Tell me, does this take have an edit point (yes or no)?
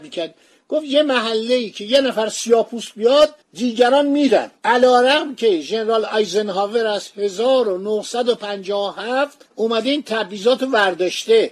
yes